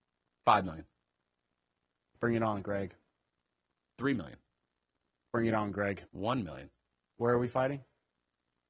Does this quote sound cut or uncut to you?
cut